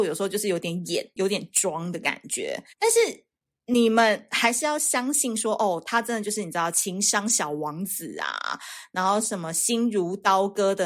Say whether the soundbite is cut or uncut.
cut